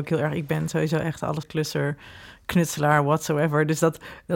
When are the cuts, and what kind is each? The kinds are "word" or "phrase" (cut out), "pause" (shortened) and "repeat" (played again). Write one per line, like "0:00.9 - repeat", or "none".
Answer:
0:01.4 - word

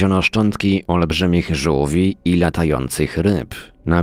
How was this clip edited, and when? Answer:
none

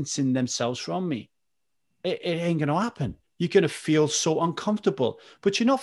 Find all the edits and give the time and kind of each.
0:01.7 - pause
0:03.2 - pause

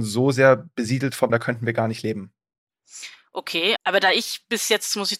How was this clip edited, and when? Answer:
0:01.3 - word
0:03.8 - word

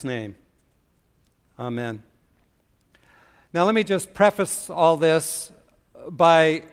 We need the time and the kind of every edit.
none

